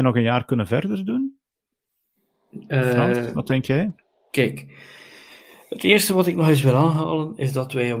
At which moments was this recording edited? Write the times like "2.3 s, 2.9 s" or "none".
none